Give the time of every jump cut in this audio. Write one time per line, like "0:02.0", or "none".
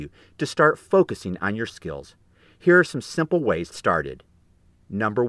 0:01.7
0:03.7